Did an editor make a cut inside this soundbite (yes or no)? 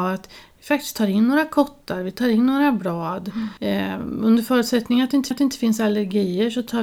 yes